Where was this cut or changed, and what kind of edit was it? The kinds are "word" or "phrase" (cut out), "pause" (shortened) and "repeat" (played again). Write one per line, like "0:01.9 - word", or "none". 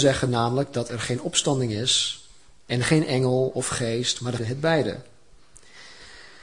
0:04.4 - phrase